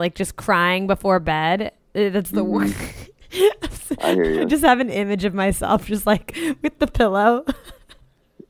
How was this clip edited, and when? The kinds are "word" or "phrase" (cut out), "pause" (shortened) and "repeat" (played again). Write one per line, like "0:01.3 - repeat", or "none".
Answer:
none